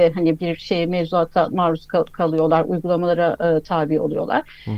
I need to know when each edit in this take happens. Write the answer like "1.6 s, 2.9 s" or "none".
none